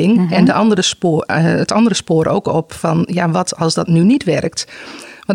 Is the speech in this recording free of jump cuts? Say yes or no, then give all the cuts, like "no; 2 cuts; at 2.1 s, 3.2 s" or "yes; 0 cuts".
yes; 0 cuts